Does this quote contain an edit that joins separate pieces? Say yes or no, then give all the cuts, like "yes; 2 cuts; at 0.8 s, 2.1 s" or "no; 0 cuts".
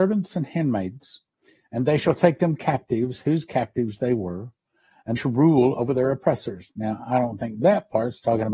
yes; 1 cut; at 5.2 s